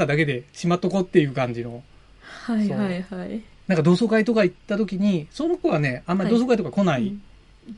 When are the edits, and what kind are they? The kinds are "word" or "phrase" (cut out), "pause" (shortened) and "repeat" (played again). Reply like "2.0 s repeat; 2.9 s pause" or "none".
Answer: none